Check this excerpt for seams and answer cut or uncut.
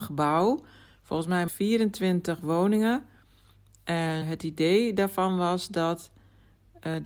cut